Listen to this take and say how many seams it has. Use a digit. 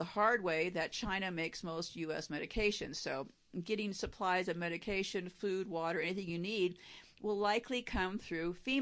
0